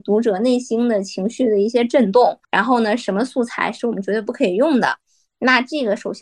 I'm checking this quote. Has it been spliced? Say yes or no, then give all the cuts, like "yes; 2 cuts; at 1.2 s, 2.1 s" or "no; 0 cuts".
yes; 1 cut; at 2.4 s